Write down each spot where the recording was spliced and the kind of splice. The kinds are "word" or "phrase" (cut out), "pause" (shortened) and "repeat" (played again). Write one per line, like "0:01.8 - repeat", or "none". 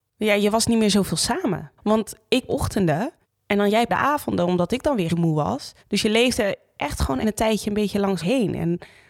0:01.8 - pause
0:02.5 - phrase
0:03.9 - word
0:05.1 - phrase
0:05.8 - pause
0:07.2 - word
0:08.2 - word